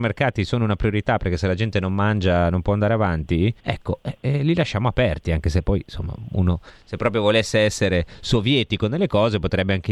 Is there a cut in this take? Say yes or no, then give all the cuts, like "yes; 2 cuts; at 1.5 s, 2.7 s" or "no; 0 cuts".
yes; 1 cut; at 3.6 s